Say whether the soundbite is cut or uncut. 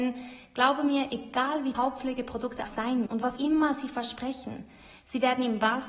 cut